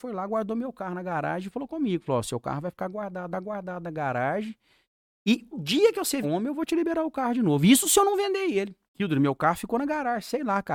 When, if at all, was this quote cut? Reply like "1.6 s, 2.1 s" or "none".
3.3 s, 5.5 s, 6.2 s, 8.9 s